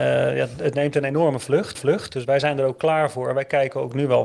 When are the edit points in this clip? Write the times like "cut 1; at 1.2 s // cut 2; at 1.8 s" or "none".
cut 1; at 1.7 s